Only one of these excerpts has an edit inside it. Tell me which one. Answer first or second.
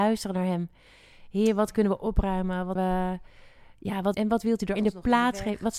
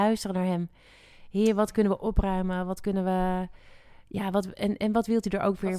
first